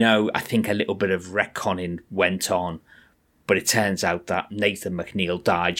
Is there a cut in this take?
no; 0 cuts

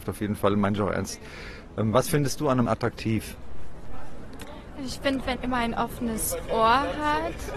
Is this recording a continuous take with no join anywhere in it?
no; 2 cuts; at 2.7 s, 5.4 s

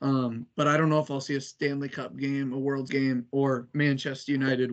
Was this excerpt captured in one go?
no; 1 cut; at 2.9 s

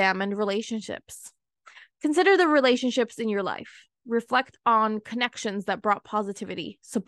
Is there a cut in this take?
no; 0 cuts

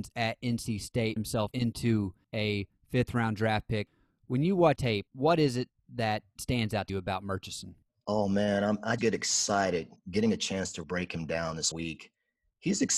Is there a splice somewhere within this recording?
yes; 6 cuts; at 1.2 s, 4.8 s, 6.9 s, 9.0 s, 10.8 s, 11.7 s

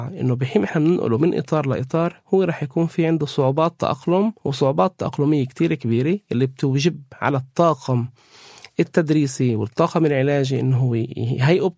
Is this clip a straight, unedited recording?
no; 1 cut; at 4.4 s

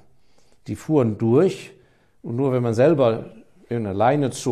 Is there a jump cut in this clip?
no; 0 cuts

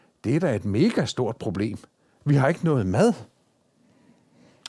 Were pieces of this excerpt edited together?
no; 0 cuts

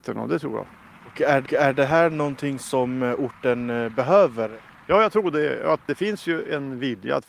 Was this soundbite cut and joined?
yes; 1 cut; at 1.5 s

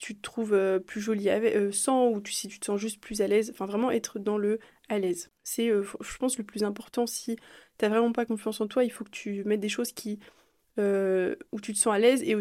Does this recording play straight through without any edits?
yes; 0 cuts

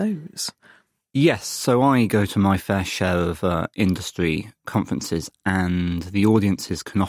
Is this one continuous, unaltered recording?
yes; 0 cuts

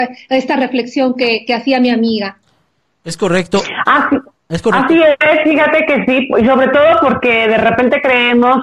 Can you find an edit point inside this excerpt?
no; 0 cuts

